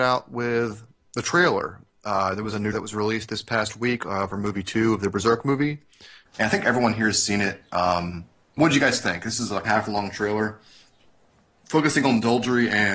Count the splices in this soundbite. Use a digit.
2